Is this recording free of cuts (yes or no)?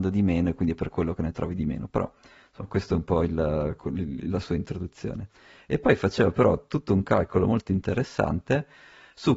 yes